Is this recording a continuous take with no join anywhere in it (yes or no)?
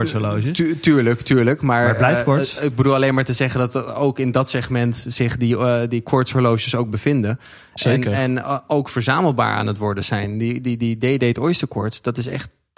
yes